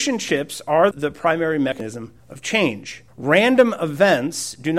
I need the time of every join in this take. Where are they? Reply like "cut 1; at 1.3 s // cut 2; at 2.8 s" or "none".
cut 1; at 0.9 s // cut 2; at 2.2 s // cut 3; at 3.1 s